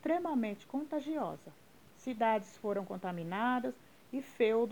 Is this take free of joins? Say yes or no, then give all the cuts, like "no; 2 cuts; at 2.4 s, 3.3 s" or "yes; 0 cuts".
yes; 0 cuts